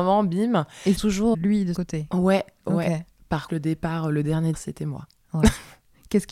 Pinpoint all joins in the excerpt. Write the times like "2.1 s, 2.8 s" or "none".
1.0 s, 1.3 s, 1.8 s, 3.5 s, 4.5 s